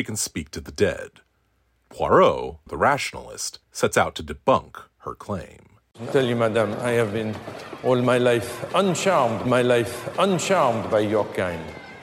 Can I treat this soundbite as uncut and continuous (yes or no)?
no